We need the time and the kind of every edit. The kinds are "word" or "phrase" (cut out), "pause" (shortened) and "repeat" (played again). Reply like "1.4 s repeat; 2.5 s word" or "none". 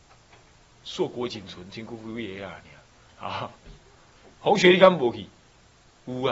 4.3 s pause